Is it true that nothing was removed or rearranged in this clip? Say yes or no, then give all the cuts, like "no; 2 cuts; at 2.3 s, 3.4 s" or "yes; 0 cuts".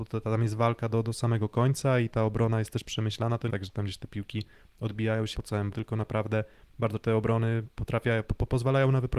no; 4 cuts; at 3.5 s, 5.3 s, 5.7 s, 7.0 s